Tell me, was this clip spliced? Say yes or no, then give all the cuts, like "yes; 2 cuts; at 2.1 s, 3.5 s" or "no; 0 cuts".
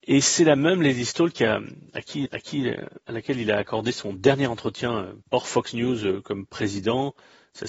yes; 2 cuts; at 2.3 s, 5.2 s